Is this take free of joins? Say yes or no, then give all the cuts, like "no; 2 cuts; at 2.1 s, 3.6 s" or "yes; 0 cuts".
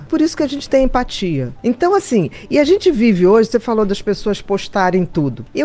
yes; 0 cuts